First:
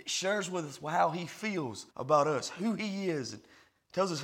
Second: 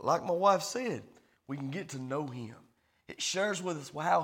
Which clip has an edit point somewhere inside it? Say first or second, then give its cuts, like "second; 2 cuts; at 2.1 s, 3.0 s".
first; 1 cut; at 1.9 s